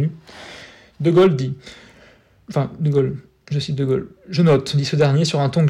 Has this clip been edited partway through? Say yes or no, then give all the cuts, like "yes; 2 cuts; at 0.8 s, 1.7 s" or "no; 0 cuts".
no; 0 cuts